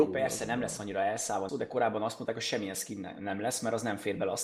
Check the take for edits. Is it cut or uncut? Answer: cut